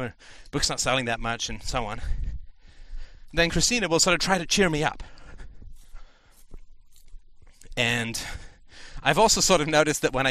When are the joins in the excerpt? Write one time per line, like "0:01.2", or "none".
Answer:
none